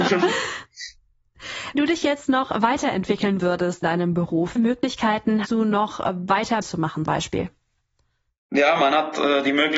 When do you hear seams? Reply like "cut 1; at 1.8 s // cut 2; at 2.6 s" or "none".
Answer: cut 1; at 1.8 s // cut 2; at 3.4 s // cut 3; at 3.8 s // cut 4; at 4.6 s // cut 5; at 5.4 s // cut 6; at 6.6 s // cut 7; at 7.1 s